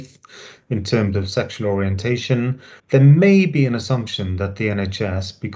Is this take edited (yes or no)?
yes